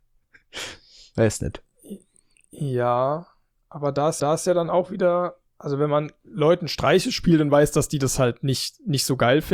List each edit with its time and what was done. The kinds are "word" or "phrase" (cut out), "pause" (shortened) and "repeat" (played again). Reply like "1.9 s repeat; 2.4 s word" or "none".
4.2 s repeat; 5.5 s pause